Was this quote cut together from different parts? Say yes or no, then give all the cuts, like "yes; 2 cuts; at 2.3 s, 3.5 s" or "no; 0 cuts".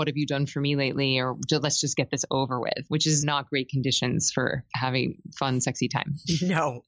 no; 0 cuts